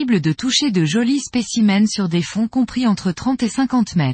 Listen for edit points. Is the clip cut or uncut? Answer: uncut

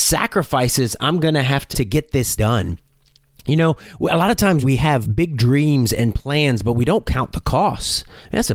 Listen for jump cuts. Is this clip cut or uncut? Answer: cut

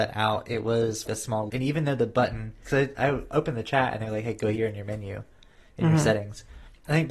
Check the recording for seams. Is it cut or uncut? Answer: cut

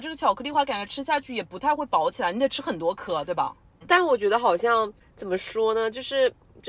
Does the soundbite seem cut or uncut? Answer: uncut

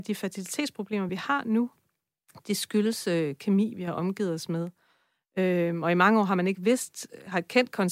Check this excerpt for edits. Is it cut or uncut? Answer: uncut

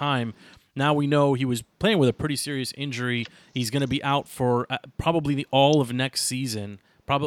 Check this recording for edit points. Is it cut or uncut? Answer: uncut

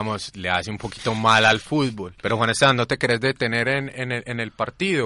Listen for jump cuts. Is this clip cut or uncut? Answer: cut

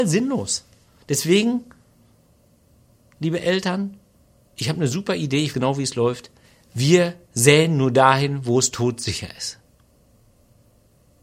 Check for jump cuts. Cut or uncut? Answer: cut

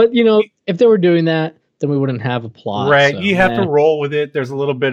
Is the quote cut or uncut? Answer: uncut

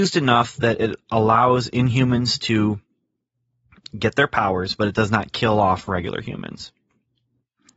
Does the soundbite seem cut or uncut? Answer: uncut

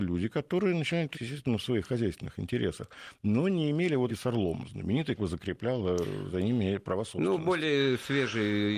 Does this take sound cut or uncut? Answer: cut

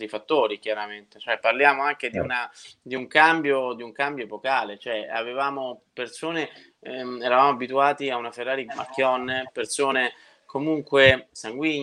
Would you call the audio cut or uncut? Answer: cut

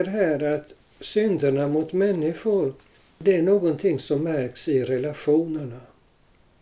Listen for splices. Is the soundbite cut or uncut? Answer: uncut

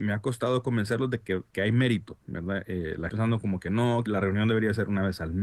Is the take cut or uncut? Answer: cut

